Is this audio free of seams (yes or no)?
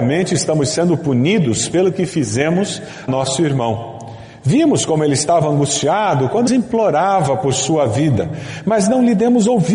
no